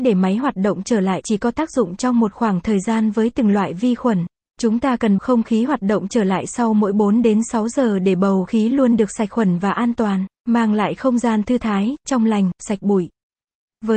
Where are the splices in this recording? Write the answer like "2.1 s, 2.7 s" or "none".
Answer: 1.2 s, 4.3 s, 5.2 s, 8.5 s, 10.4 s